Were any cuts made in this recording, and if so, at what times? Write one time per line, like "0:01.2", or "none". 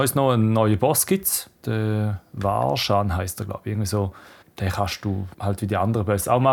0:01.6
0:04.4
0:05.3